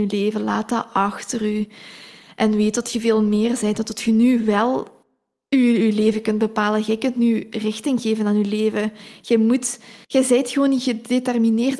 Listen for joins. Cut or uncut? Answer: cut